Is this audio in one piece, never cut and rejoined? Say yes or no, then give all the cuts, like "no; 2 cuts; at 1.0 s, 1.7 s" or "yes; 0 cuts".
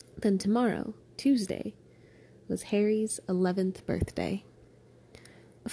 no; 1 cut; at 1.0 s